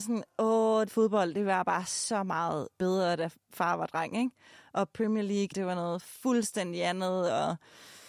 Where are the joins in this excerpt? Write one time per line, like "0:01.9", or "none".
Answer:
0:05.5